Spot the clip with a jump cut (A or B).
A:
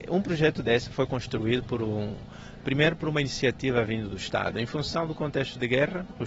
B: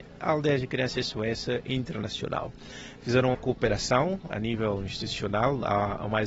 B